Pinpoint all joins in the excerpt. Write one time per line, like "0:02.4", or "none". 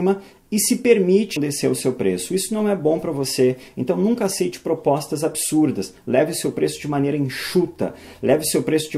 0:01.4

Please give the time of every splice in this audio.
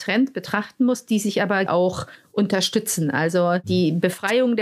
0:01.7

